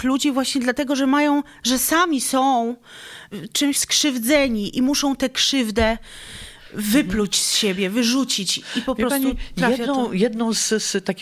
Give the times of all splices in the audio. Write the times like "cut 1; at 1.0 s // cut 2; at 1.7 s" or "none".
cut 1; at 3.3 s // cut 2; at 3.7 s